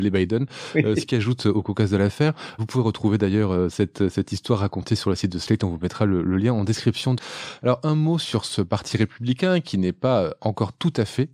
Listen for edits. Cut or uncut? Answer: uncut